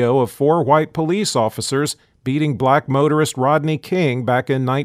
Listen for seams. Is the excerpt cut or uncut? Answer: uncut